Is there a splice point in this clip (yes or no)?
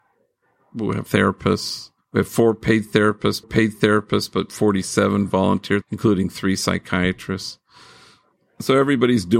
yes